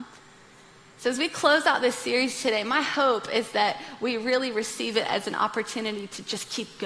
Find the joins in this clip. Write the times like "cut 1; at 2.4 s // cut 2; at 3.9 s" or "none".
none